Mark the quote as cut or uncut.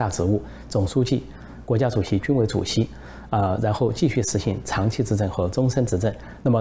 uncut